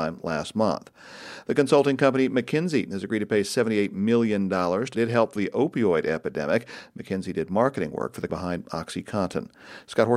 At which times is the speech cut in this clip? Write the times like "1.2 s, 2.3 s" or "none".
4.9 s, 5.4 s, 8.3 s